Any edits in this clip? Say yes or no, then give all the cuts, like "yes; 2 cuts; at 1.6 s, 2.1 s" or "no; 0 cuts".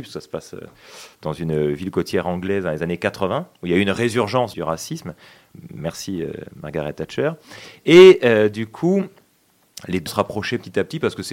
yes; 2 cuts; at 4.5 s, 10.1 s